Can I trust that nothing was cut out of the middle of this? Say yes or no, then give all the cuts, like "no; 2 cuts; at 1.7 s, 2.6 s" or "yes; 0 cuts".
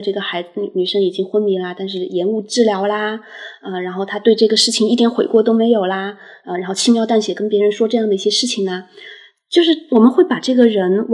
yes; 0 cuts